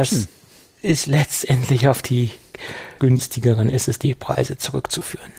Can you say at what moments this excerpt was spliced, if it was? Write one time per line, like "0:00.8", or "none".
0:03.0